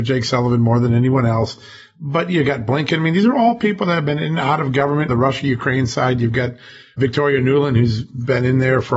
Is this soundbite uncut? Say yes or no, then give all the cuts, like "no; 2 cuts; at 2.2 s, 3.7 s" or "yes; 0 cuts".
no; 1 cut; at 5.1 s